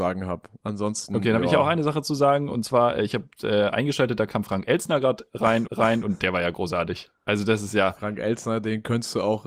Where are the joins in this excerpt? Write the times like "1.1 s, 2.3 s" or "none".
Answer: 5.7 s